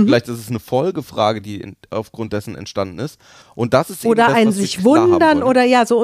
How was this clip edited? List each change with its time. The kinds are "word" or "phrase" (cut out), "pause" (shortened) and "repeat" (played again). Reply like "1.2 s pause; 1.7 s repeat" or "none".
none